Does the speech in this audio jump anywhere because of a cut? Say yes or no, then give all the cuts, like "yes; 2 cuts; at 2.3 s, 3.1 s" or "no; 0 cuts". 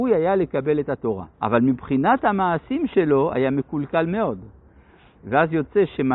yes; 1 cut; at 1.3 s